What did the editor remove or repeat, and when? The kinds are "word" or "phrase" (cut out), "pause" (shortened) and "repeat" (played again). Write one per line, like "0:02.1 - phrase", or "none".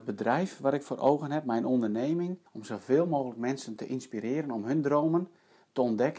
0:02.5 - pause